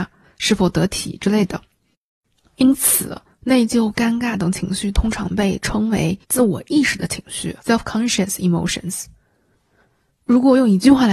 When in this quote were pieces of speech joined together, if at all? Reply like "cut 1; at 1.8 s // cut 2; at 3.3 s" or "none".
cut 1; at 6.2 s // cut 2; at 7.6 s